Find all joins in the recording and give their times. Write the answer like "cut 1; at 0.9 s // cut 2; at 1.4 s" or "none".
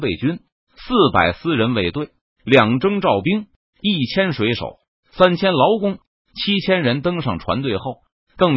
none